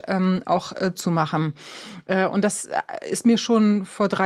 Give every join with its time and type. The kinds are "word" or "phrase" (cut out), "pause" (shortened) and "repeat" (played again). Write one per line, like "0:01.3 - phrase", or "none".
0:00.9 - word